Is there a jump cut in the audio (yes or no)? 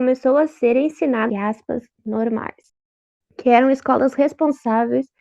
yes